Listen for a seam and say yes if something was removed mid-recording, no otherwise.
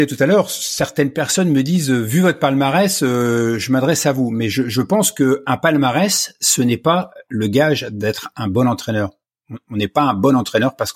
no